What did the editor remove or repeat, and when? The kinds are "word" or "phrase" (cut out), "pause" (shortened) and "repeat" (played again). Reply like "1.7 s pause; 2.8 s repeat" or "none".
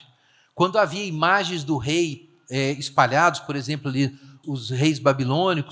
4.4 s word